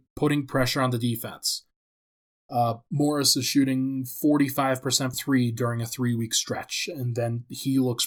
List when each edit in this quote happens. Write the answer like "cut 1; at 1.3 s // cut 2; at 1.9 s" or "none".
cut 1; at 5.1 s